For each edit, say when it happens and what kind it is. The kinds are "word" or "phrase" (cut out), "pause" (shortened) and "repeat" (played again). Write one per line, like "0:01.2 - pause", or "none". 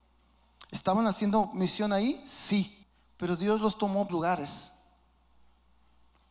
0:02.8 - pause
0:04.1 - phrase